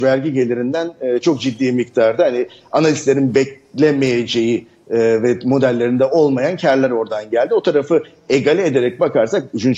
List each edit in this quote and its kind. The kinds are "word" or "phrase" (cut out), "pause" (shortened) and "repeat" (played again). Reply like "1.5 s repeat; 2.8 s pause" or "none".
none